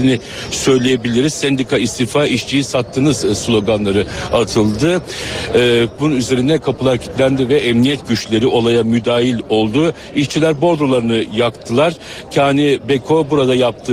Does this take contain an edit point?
no; 0 cuts

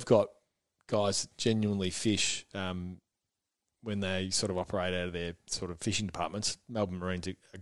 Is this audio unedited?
yes; 0 cuts

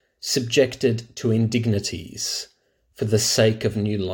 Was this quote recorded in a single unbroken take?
yes; 0 cuts

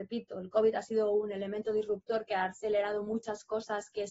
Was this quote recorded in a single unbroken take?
yes; 0 cuts

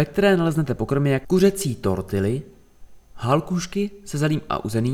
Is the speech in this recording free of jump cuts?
no; 1 cut; at 1.2 s

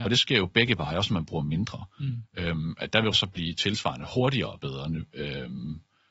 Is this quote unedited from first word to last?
no; 1 cut; at 3.1 s

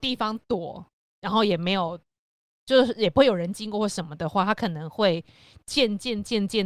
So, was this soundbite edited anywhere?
no; 0 cuts

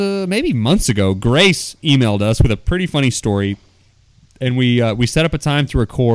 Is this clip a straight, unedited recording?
yes; 0 cuts

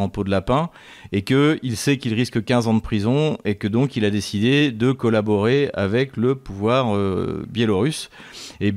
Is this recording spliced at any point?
no; 0 cuts

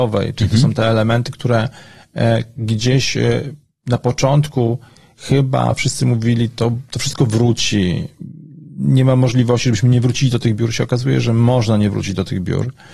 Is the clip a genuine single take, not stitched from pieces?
yes; 0 cuts

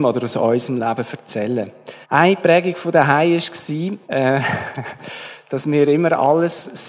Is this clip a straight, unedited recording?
no; 2 cuts; at 2.0 s, 4.1 s

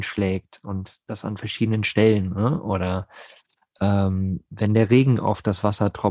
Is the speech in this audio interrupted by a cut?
no; 0 cuts

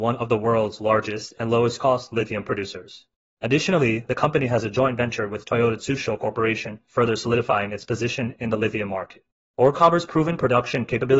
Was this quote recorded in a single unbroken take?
yes; 0 cuts

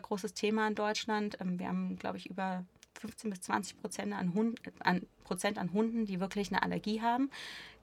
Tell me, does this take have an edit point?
no; 0 cuts

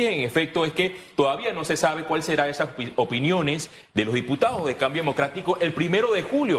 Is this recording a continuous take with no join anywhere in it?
yes; 0 cuts

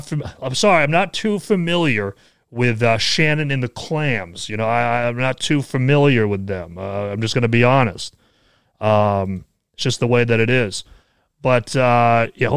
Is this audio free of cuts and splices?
yes; 0 cuts

